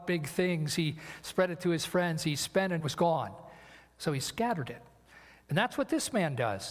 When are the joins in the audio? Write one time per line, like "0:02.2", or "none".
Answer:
0:02.8